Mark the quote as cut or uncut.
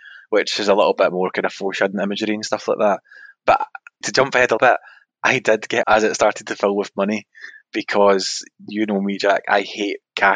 cut